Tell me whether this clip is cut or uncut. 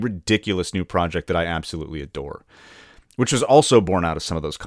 uncut